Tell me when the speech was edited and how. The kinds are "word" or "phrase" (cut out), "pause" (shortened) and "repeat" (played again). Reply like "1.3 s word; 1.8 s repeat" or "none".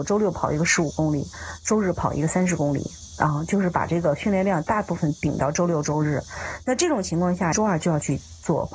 7.5 s phrase